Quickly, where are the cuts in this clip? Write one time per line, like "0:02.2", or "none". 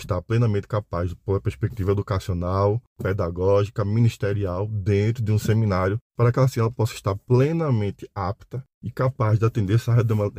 0:08.7